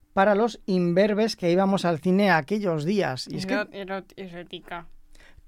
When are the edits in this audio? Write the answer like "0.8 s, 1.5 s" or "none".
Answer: none